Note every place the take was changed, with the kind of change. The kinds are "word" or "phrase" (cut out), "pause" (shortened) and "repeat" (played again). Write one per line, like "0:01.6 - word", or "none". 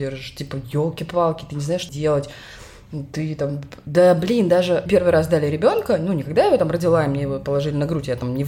0:01.9 - phrase
0:04.9 - phrase